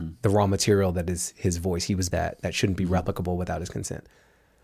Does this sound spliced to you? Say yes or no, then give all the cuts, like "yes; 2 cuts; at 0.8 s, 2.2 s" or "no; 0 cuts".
yes; 1 cut; at 2.1 s